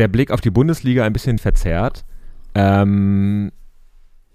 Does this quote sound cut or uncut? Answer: cut